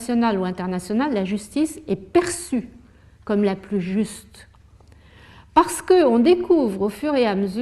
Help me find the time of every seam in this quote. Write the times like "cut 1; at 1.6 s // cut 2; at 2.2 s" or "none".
none